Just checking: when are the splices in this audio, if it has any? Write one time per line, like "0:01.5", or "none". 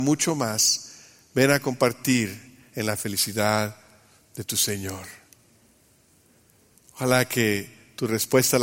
none